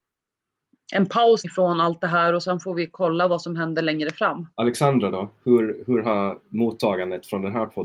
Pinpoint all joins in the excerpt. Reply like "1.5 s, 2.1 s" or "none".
1.4 s, 4.5 s